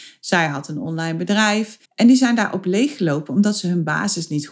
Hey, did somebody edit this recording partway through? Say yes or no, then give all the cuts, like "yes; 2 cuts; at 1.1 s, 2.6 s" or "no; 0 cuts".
yes; 1 cut; at 1.9 s